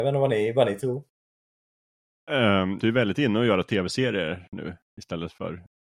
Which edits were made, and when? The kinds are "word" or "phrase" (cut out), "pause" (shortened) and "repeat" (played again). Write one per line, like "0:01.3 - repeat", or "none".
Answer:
0:02.8 - phrase